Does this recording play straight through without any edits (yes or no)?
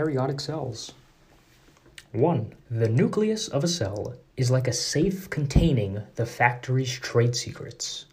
no